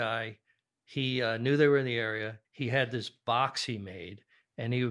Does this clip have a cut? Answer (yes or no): yes